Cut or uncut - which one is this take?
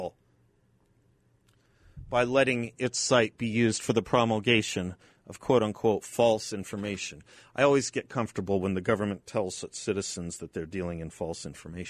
uncut